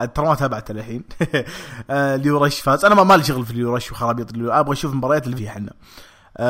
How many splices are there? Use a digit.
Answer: 1